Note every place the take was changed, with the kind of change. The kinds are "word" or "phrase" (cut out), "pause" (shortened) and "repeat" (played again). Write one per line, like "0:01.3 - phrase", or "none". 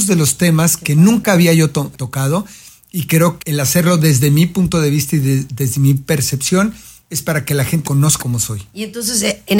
0:01.9 - word
0:03.4 - word
0:07.8 - word
0:08.2 - word

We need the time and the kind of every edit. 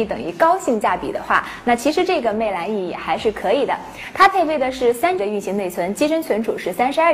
0:05.2 - word

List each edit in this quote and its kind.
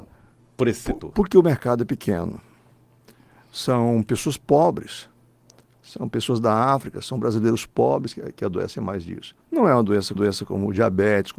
0:08.1 - word
0:09.4 - pause
0:10.2 - repeat

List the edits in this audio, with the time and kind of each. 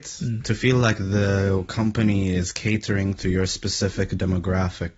none

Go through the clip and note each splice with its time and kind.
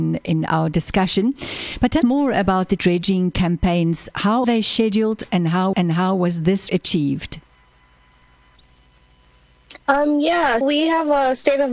0:02.0 - word
0:02.8 - word
0:04.4 - word
0:05.7 - repeat
0:06.7 - word
0:09.8 - pause
0:10.6 - word

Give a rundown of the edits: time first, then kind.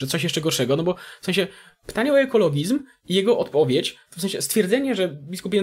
none

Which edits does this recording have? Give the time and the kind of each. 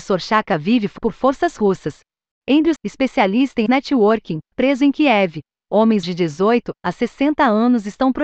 0:01.0 - word
0:02.8 - word
0:03.7 - word
0:04.5 - word
0:06.0 - word

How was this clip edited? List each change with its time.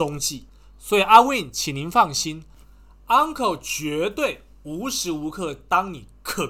none

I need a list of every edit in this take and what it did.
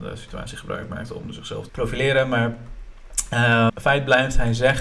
0:01.7 - word
0:03.7 - word

